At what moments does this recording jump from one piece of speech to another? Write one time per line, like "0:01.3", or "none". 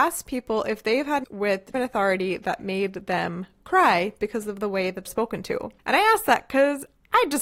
0:01.2
0:01.7
0:05.1
0:05.8